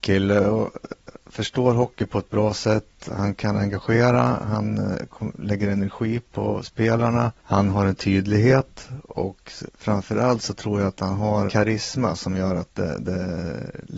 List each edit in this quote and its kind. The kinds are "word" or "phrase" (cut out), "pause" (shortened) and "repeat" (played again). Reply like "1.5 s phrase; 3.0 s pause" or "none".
7.4 s pause; 9.7 s word; 11.5 s word